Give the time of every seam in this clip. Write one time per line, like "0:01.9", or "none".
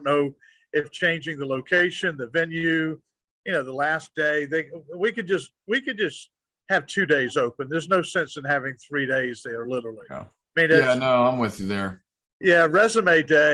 none